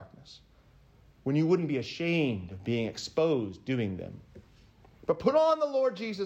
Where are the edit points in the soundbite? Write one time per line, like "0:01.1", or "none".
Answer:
none